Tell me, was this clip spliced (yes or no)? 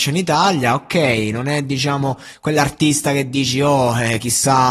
no